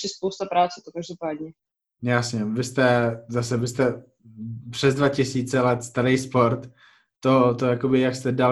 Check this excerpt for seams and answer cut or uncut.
uncut